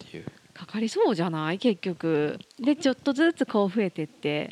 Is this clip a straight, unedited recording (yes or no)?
no